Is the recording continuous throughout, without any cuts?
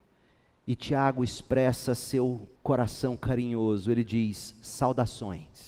no; 1 cut; at 2.6 s

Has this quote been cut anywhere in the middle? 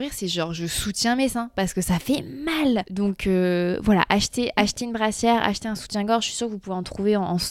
no; 0 cuts

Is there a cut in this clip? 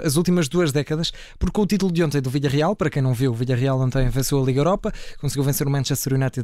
no; 0 cuts

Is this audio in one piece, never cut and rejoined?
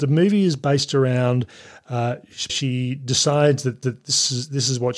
no; 2 cuts; at 2.5 s, 3.8 s

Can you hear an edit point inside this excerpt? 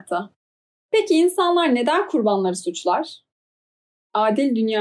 no; 0 cuts

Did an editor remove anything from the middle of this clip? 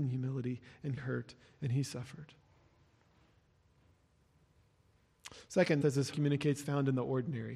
yes; 4 cuts; at 1.0 s, 5.8 s, 6.1 s, 6.6 s

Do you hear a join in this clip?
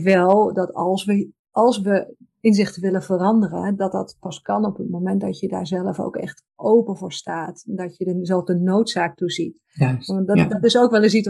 yes; 2 cuts; at 1.4 s, 6.5 s

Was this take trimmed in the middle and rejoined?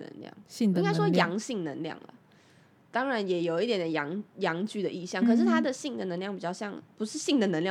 no; 0 cuts

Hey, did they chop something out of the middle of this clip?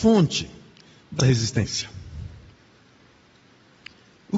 yes; 1 cut; at 1.2 s

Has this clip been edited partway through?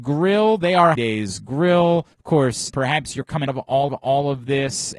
yes; 5 cuts; at 1.0 s, 2.1 s, 2.7 s, 3.5 s, 3.9 s

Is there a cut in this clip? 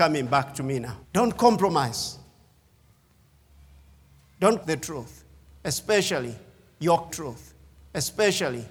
yes; 3 cuts; at 1.0 s, 4.6 s, 7.1 s

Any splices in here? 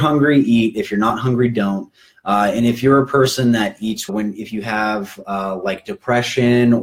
yes; 1 cut; at 4.1 s

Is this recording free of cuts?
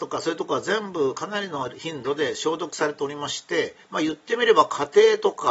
no; 1 cut; at 3.8 s

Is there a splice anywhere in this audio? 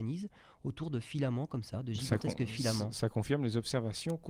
no; 0 cuts

